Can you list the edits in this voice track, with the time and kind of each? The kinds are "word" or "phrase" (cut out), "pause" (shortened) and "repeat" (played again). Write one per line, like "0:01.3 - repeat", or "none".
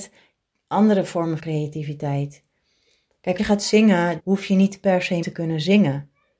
0:01.4 - word
0:03.4 - word
0:04.2 - word
0:05.2 - word